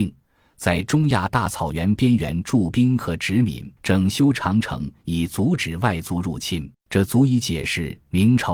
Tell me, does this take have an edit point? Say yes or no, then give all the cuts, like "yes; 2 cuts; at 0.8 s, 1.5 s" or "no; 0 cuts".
yes; 2 cuts; at 3.8 s, 6.7 s